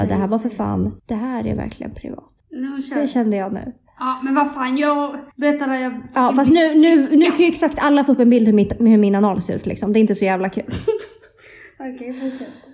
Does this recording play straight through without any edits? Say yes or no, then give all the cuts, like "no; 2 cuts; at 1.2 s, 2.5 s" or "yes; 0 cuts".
no; 3 cuts; at 1.0 s, 2.4 s, 5.3 s